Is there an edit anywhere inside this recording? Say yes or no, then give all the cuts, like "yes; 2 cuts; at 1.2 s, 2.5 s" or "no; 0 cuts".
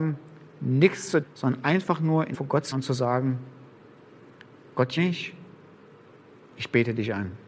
yes; 4 cuts; at 1.2 s, 2.3 s, 2.7 s, 5.0 s